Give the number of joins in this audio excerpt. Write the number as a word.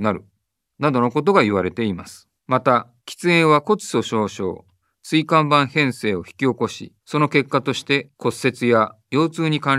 four